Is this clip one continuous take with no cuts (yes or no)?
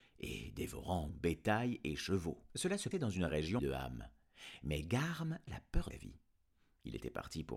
no